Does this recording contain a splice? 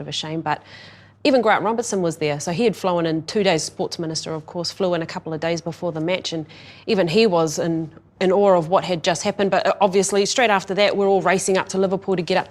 no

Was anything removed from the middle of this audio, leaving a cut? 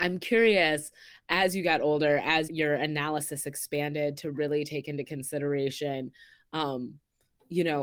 yes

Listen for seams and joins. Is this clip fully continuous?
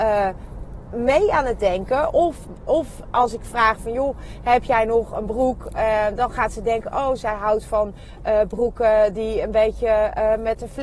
yes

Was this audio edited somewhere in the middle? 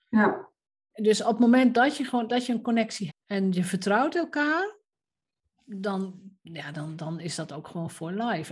yes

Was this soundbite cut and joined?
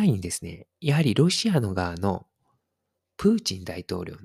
no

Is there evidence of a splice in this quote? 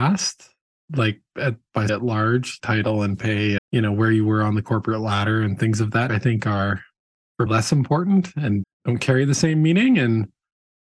yes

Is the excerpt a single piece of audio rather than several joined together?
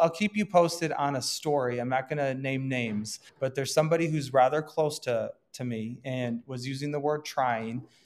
no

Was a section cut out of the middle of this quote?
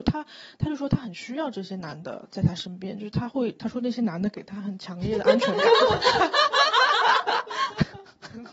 no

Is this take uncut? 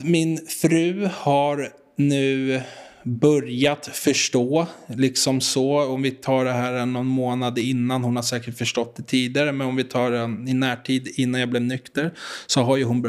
yes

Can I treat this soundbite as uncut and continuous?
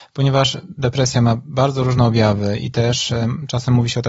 yes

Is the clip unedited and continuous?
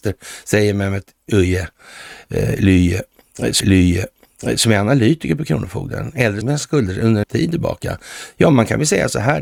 no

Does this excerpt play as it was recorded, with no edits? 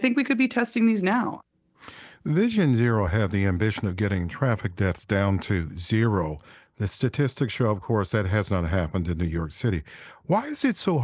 yes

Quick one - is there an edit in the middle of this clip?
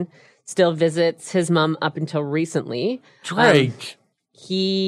no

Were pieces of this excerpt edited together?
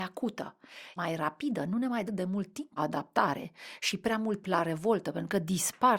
yes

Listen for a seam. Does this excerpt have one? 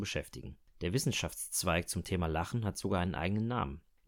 no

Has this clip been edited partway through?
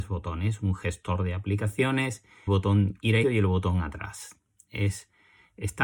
yes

